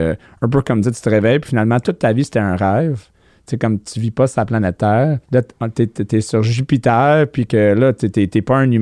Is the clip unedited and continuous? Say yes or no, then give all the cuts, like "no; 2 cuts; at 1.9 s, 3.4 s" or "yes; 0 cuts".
no; 1 cut; at 5.2 s